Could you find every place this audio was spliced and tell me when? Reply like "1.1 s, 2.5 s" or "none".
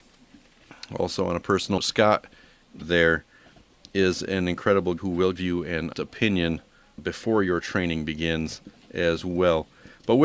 1.8 s, 2.8 s, 5.0 s, 5.4 s, 5.9 s, 7.0 s